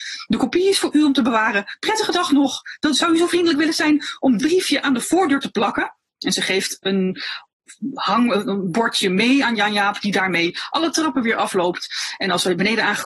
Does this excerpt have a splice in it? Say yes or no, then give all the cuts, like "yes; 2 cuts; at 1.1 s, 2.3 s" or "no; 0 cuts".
yes; 1 cut; at 4.4 s